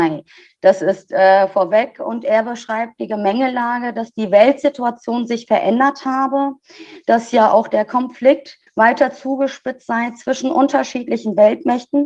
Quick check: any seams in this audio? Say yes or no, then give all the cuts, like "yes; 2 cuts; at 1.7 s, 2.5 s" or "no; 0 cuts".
yes; 1 cut; at 8.7 s